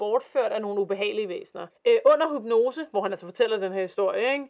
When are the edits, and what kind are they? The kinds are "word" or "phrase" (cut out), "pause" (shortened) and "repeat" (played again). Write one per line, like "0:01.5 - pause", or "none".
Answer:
0:01.7 - pause